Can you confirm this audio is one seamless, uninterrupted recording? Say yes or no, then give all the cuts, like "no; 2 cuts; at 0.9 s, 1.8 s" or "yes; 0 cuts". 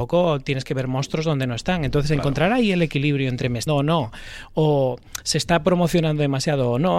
no; 1 cut; at 3.7 s